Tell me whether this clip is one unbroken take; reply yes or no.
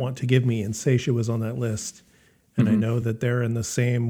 yes